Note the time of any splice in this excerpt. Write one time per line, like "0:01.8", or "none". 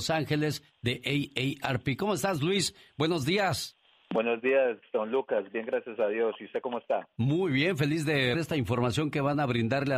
0:08.3